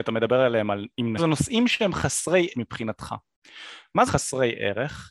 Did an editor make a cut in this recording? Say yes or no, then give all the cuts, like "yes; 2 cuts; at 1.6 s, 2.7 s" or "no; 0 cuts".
yes; 3 cuts; at 1.2 s, 2.5 s, 4.1 s